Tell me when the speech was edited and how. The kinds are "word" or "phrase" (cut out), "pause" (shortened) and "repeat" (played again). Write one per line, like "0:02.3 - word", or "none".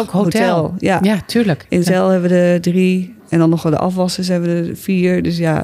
0:01.8 - word
0:03.2 - pause